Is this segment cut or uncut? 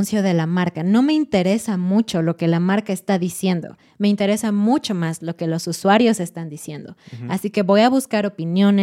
uncut